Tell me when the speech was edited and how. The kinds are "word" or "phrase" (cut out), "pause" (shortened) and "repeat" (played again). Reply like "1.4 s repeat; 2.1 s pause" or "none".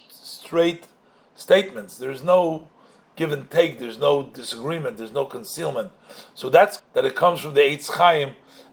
6.8 s word